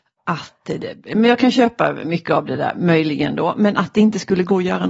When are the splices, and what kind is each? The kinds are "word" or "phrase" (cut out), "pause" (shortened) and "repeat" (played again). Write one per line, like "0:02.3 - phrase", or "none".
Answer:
0:01.0 - pause